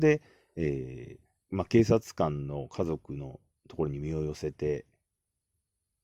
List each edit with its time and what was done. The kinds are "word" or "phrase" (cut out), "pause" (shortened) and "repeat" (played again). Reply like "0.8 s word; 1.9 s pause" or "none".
1.4 s pause